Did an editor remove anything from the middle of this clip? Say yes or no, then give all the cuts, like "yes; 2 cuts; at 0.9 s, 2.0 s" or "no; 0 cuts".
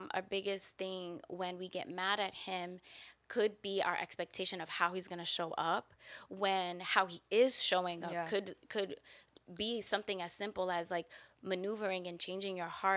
no; 0 cuts